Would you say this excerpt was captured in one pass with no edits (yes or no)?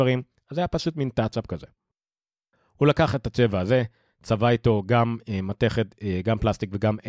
yes